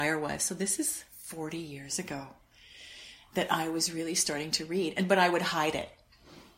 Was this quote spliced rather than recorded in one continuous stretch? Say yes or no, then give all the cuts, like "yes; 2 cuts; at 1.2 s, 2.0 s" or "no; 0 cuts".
no; 0 cuts